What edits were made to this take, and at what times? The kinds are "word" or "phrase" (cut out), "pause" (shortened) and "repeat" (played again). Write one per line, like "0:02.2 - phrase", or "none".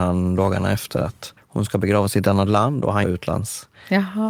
0:01.4 - pause
0:03.0 - phrase